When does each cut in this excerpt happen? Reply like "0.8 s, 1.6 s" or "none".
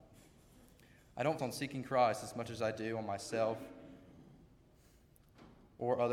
1.4 s